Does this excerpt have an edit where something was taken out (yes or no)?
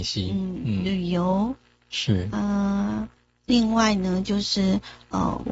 no